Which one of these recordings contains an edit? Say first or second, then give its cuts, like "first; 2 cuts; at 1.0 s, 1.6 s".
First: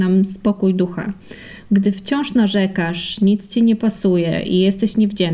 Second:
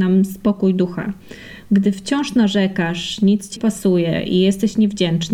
second; 1 cut; at 3.6 s